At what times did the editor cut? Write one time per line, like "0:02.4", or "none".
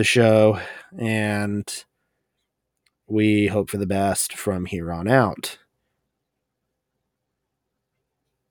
none